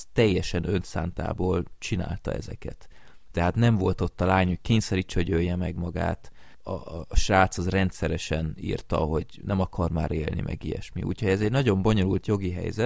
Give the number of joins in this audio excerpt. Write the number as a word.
zero